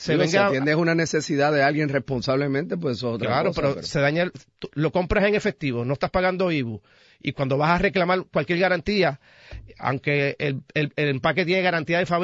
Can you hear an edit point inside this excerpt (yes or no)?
no